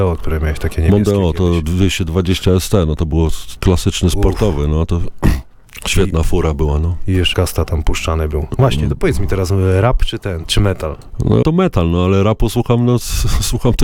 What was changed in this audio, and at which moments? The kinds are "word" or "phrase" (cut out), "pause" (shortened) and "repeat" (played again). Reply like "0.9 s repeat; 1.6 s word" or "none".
3.6 s word; 7.3 s word; 10.4 s word; 11.4 s word